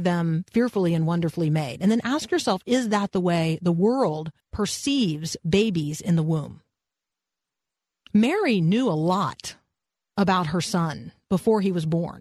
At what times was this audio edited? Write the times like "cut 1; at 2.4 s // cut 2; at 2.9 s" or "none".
cut 1; at 4.4 s